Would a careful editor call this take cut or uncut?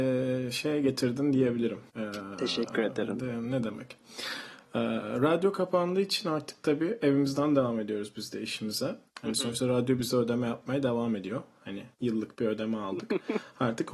cut